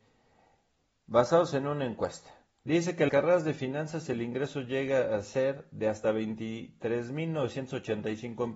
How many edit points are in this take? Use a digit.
1